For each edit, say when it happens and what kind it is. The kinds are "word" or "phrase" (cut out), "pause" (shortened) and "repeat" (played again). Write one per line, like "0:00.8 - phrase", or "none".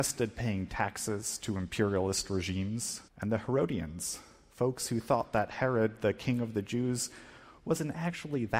0:03.1 - pause

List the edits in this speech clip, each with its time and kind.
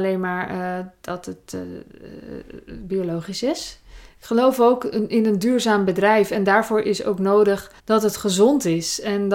0:07.8 - pause

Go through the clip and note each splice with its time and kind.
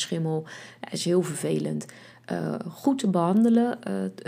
none

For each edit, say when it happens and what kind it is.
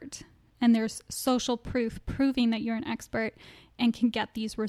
none

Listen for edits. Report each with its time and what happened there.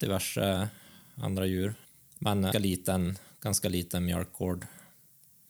0:01.8 - pause
0:02.5 - phrase

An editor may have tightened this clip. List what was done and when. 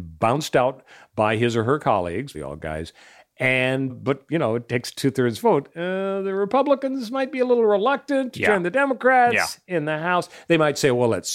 0:02.3 - word
0:03.9 - word

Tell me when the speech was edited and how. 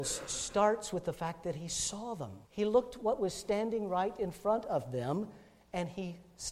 0:02.4 - pause

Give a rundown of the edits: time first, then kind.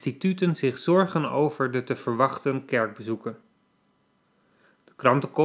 none

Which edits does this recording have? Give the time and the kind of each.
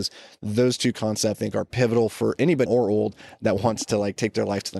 0:01.3 - word
0:02.7 - word

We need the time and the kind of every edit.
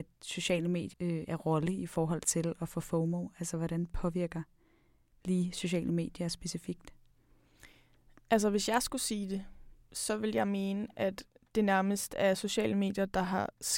0:00.9 - word

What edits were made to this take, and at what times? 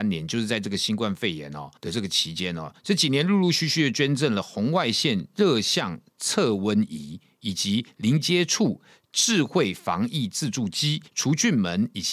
0:01.8 - pause
0:11.1 - pause

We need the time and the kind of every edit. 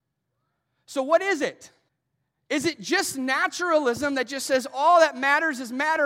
0:01.9 - pause

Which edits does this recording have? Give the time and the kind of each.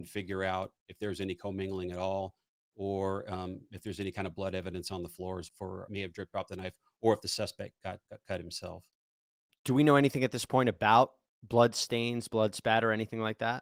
0:05.5 - word
0:05.9 - word
0:08.1 - word

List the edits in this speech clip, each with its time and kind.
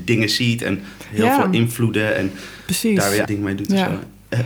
0:03.2 - word

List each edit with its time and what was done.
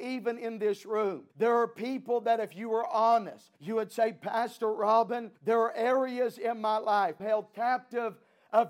0:01.3 - pause
0:03.6 - pause
0:05.4 - pause
0:07.2 - phrase

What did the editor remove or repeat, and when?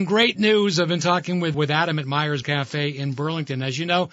0:01.5 - word
0:02.4 - word

